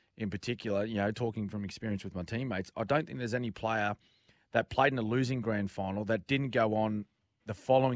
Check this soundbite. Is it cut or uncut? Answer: uncut